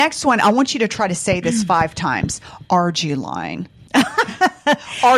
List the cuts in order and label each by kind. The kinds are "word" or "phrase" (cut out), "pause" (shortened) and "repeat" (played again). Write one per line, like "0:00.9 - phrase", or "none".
none